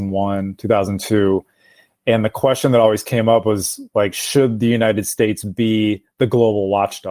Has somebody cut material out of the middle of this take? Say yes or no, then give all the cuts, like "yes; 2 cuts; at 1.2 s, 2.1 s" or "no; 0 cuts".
no; 0 cuts